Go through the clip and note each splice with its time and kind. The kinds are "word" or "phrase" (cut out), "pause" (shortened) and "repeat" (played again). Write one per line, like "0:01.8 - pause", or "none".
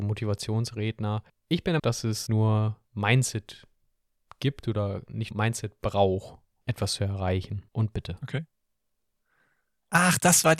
0:01.3 - pause
0:01.8 - word
0:02.3 - word
0:02.9 - pause
0:05.3 - word
0:06.6 - word
0:07.7 - pause